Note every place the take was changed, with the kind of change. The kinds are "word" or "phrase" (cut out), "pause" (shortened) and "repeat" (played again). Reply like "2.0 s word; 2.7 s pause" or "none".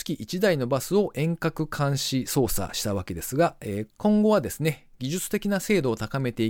none